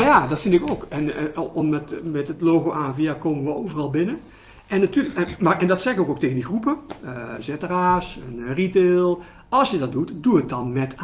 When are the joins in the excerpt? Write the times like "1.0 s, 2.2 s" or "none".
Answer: none

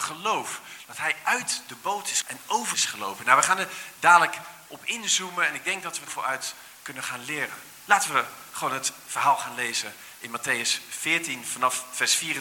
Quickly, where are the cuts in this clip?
2.2 s, 2.7 s, 6.1 s

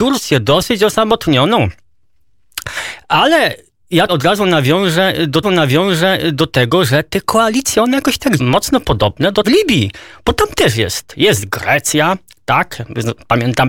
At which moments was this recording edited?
4.1 s, 5.4 s, 8.4 s, 9.4 s

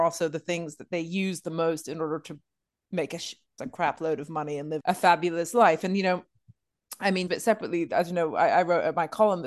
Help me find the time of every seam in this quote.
3.6 s, 4.8 s, 7.3 s

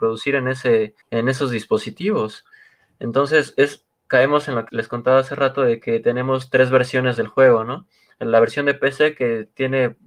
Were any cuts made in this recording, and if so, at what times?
1.0 s, 4.7 s

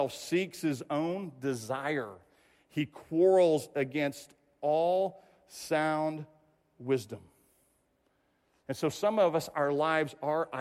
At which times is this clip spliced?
none

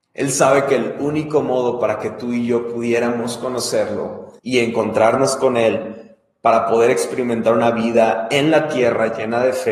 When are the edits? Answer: 4.4 s

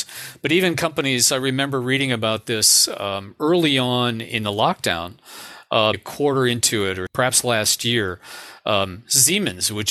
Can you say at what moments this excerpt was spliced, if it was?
5.9 s, 7.1 s

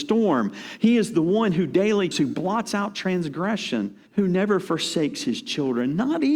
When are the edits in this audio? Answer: 2.1 s, 4.1 s

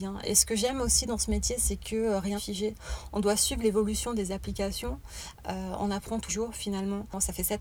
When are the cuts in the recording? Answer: 2.4 s, 6.3 s

